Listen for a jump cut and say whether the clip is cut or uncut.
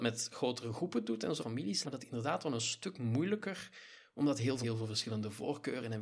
cut